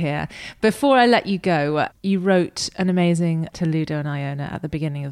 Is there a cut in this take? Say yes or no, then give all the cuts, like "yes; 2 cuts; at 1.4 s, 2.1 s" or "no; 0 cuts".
yes; 2 cuts; at 1.9 s, 3.5 s